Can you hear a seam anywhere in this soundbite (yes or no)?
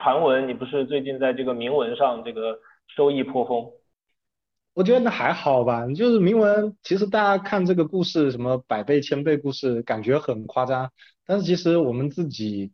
yes